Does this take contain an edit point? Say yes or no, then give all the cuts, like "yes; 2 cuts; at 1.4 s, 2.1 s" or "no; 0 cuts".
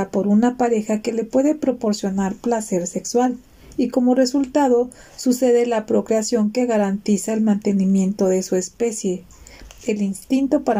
no; 0 cuts